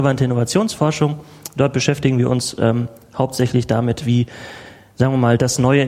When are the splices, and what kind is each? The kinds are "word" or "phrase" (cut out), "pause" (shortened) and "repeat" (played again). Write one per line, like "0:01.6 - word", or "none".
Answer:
none